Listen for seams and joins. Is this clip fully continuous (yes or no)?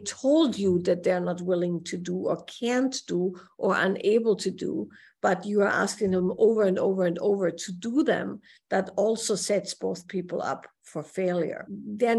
yes